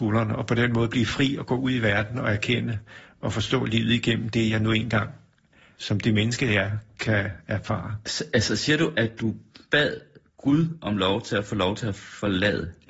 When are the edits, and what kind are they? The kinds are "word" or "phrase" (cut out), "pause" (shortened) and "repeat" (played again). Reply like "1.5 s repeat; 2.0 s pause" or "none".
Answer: none